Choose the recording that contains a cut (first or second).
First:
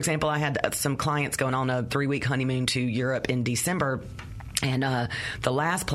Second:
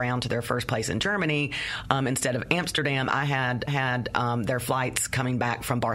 second